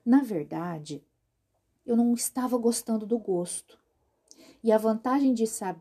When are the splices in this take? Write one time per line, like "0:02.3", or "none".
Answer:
none